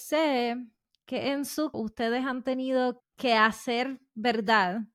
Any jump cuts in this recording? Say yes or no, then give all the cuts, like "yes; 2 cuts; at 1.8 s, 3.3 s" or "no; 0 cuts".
yes; 3 cuts; at 1.0 s, 1.7 s, 3.0 s